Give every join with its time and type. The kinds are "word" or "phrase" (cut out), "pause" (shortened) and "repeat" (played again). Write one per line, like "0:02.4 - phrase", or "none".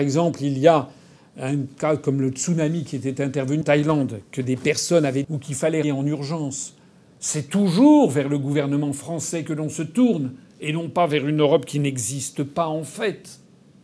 0:03.6 - word
0:05.2 - word
0:05.8 - word